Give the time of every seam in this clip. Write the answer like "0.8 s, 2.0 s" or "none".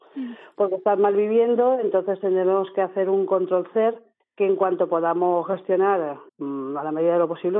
4.2 s, 6.3 s